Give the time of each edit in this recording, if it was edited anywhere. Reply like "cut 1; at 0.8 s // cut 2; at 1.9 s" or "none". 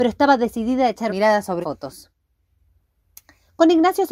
cut 1; at 1.1 s // cut 2; at 1.6 s